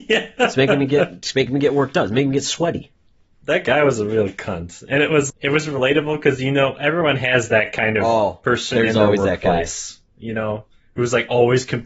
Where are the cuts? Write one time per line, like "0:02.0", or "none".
0:05.3

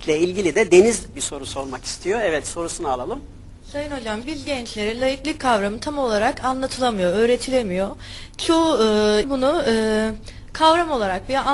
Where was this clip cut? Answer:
0:01.1
0:04.2
0:09.2

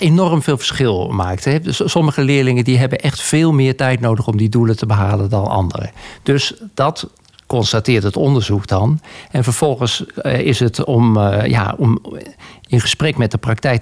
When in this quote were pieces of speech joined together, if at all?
none

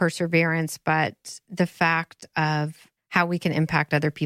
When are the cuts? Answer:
none

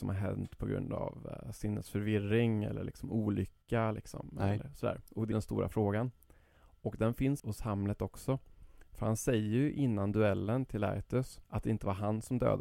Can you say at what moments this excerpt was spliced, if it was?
0:05.3
0:07.4
0:11.4

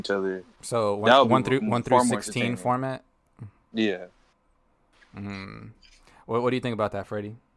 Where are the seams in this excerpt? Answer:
none

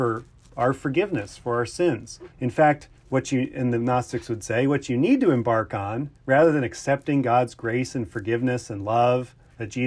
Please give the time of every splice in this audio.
0:02.3
0:03.0
0:06.2

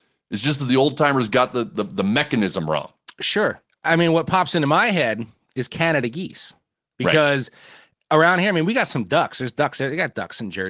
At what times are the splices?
none

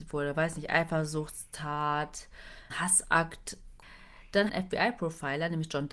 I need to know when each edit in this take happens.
0:02.7
0:04.5

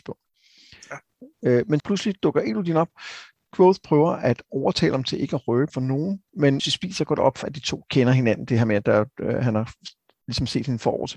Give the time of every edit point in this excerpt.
0:01.8
0:05.7
0:06.6
0:07.4

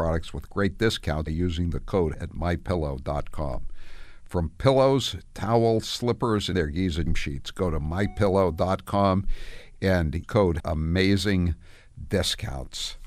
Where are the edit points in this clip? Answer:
0:01.3
0:02.1
0:06.5
0:07.1
0:10.2
0:10.6

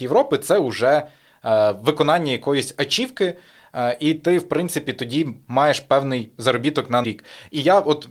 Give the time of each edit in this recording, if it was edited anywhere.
0:07.0

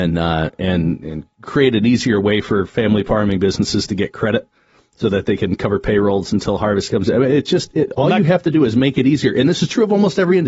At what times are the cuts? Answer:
none

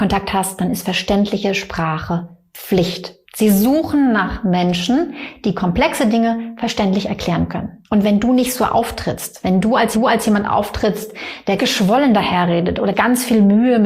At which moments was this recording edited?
0:03.2
0:07.8
0:09.9
0:11.6
0:12.9

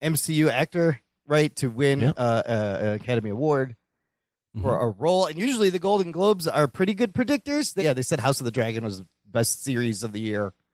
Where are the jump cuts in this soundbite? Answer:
0:07.8

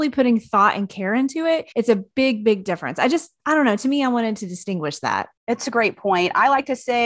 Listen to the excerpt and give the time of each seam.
0:01.7
0:05.4

